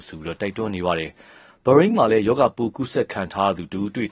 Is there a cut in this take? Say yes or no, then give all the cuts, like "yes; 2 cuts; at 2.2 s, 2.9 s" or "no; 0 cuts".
no; 0 cuts